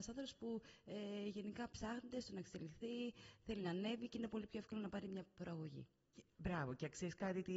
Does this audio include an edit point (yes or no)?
no